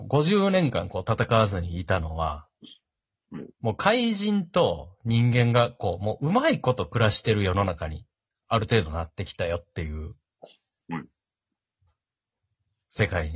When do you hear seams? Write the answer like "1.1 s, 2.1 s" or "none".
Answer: none